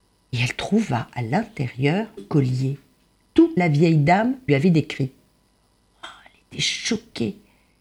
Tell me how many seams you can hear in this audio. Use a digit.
3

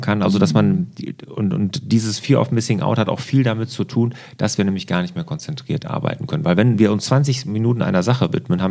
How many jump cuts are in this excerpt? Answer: 0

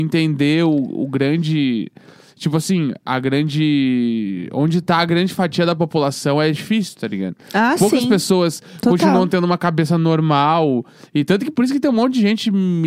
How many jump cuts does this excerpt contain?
0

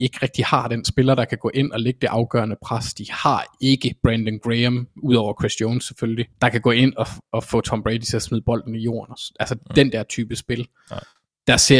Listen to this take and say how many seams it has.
1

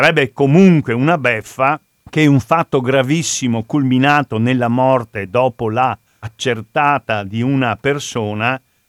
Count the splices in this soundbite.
2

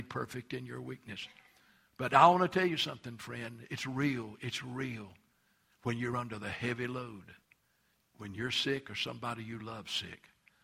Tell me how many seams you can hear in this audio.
0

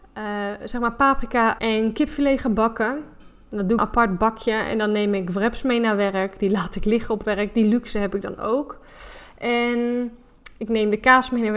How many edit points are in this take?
2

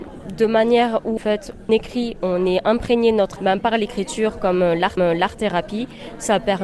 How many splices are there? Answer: 4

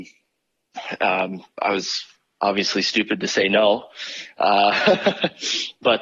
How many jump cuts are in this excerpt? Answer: 0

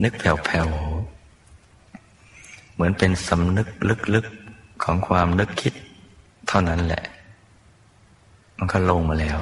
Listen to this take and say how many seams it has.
0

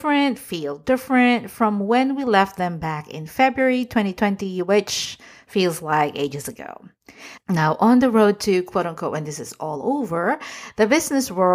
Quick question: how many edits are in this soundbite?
0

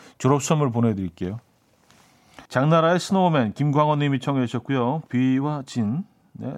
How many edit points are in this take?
1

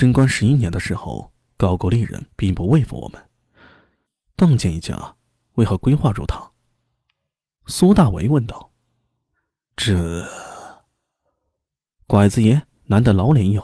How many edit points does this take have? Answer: 1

